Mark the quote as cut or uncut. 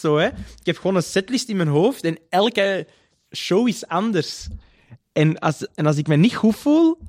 uncut